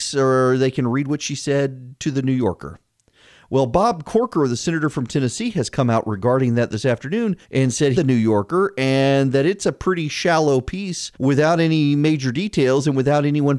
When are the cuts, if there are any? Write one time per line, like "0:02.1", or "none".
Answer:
0:07.4
0:07.9
0:11.1

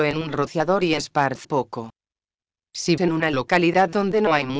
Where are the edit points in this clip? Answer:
0:01.4
0:03.0

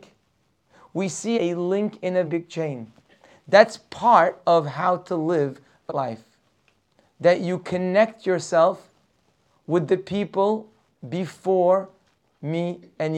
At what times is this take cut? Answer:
0:01.3
0:02.3
0:05.9

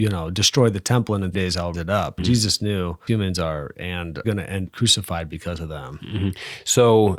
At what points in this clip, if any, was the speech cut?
0:01.3
0:01.7
0:02.2
0:03.1
0:03.8
0:04.2
0:04.7

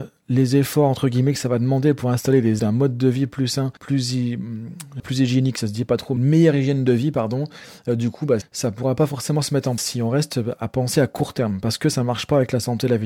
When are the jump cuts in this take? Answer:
0:02.6
0:03.8
0:05.0
0:06.2
0:08.4
0:09.8

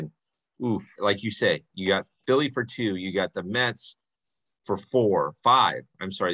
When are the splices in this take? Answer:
0:01.0

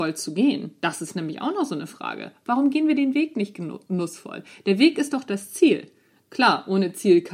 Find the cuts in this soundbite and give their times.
none

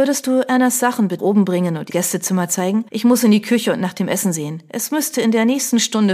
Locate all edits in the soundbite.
0:01.2
0:01.9
0:02.9

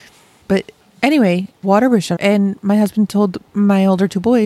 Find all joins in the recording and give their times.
0:01.6
0:02.2
0:03.5

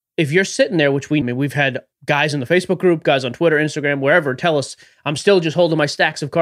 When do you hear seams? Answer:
0:01.2
0:01.9

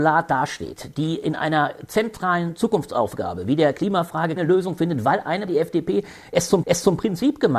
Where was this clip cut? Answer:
0:04.4
0:05.5
0:06.6

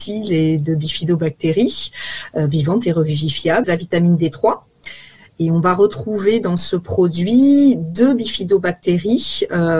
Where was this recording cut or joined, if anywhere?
0:03.6

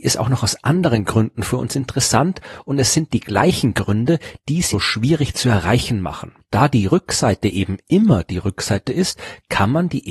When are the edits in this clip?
0:04.7

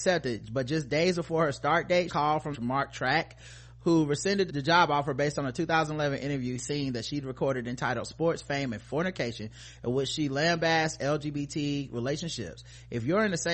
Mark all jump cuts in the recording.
0:02.1
0:02.5
0:04.5
0:06.6

